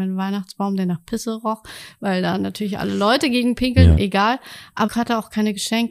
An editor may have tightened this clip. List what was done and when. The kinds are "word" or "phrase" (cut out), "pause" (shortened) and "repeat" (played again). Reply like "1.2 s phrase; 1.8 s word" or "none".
4.9 s word

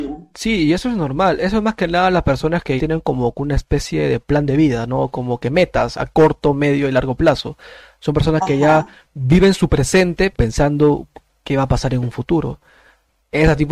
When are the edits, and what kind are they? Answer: 2.8 s word; 5.9 s word; 10.3 s word

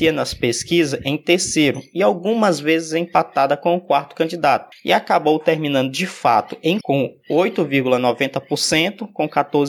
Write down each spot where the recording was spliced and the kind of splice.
6.8 s word

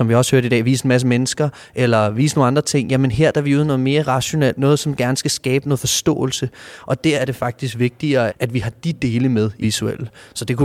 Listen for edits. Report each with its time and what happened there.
4.6 s word; 8.3 s word; 9.6 s word

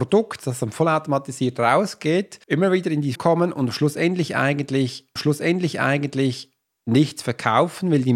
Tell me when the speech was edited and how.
2.4 s pause; 3.2 s word; 5.2 s repeat

